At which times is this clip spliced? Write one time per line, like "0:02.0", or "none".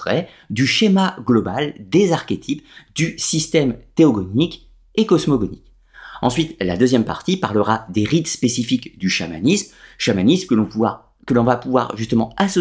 none

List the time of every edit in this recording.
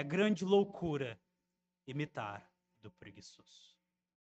0:02.7

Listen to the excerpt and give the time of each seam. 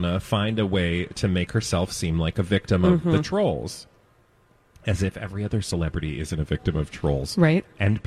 none

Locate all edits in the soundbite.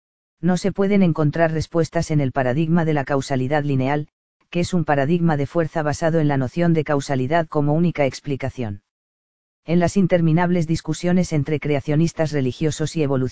none

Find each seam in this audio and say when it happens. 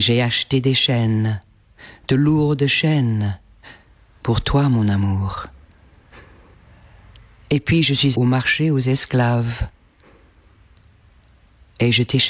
0:08.1

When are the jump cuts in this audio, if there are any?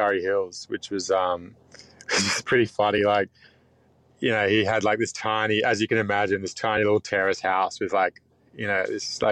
none

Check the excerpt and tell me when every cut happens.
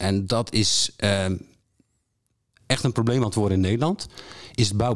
none

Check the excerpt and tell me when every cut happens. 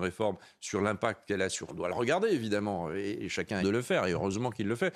0:01.7
0:03.6

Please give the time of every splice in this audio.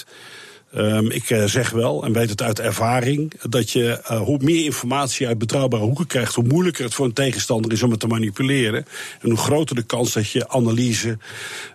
none

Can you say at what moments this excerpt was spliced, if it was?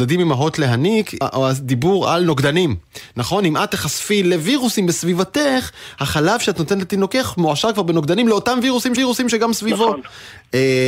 0:01.2
0:09.0

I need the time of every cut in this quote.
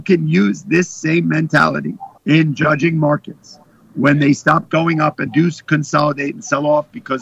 0:02.2
0:05.3

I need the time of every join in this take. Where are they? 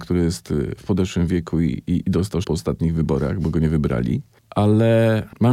0:01.9
0:02.4

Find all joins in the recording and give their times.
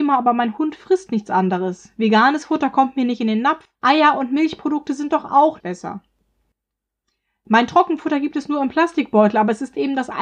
0:03.7
0:05.6

